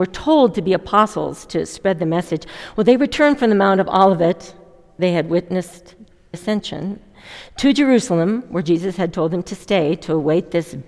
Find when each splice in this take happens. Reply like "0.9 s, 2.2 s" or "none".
5.0 s, 6.3 s